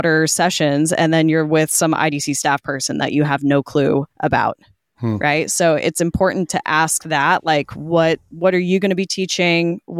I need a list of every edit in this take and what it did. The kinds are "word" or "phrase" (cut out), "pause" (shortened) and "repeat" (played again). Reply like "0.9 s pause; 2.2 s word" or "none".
4.1 s pause